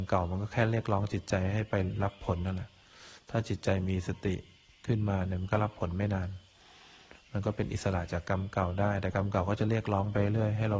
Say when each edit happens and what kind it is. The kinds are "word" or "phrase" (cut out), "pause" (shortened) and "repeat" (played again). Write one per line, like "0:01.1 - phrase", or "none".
none